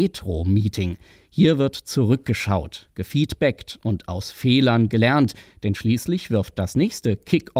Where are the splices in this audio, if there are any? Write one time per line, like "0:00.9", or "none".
none